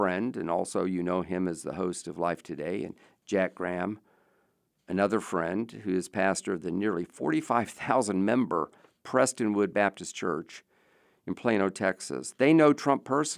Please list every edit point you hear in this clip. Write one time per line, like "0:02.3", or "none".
none